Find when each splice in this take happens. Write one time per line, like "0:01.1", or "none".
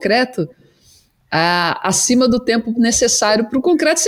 none